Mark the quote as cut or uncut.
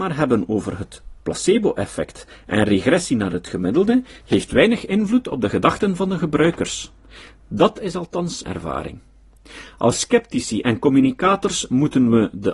cut